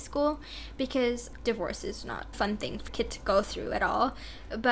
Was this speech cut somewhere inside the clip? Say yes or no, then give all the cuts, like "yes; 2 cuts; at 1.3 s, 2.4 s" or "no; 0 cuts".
yes; 3 cuts; at 1.4 s, 2.3 s, 2.9 s